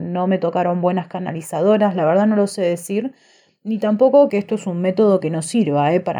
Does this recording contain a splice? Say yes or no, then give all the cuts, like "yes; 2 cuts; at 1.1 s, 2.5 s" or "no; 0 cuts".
yes; 1 cut; at 4.3 s